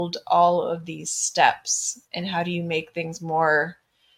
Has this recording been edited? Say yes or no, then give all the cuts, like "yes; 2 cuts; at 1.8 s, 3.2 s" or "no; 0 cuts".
yes; 1 cut; at 2.0 s